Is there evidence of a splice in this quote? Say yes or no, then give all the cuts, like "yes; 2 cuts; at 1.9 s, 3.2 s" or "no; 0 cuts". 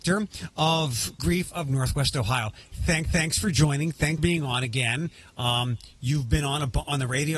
yes; 3 cuts; at 1.2 s, 3.0 s, 4.2 s